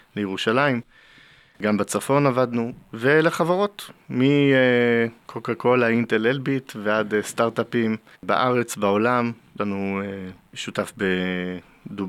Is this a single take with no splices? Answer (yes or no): no